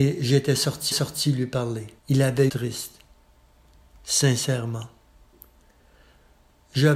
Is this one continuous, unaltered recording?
no; 3 cuts; at 0.9 s, 2.0 s, 2.5 s

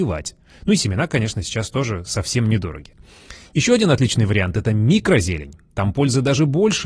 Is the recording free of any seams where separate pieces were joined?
yes; 0 cuts

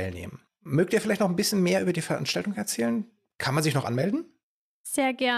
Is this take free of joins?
yes; 0 cuts

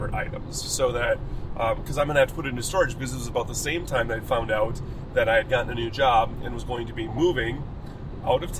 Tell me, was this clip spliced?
no; 0 cuts

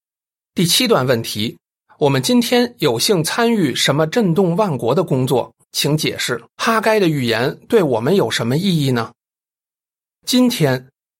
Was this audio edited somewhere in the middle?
yes; 3 cuts; at 1.7 s, 5.6 s, 6.5 s

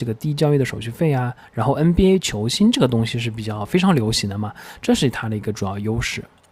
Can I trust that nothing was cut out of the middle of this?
yes; 0 cuts

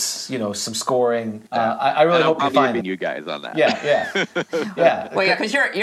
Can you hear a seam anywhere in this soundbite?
yes; 2 cuts; at 1.5 s, 2.8 s

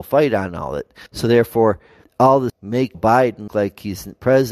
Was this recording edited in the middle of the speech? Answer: yes; 5 cuts; at 1.1 s, 2.0 s, 2.5 s, 2.9 s, 3.5 s

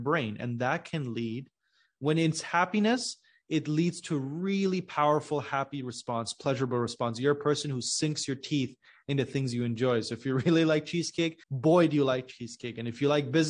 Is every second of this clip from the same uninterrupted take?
no; 1 cut; at 11.4 s

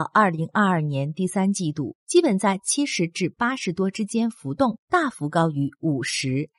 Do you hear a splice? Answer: yes; 1 cut; at 2.0 s

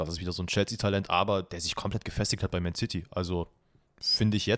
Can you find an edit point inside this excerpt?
no; 0 cuts

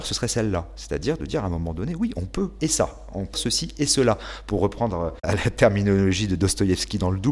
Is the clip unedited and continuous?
no; 2 cuts; at 2.6 s, 3.3 s

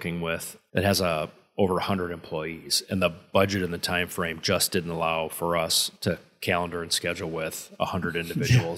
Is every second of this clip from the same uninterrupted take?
yes; 0 cuts

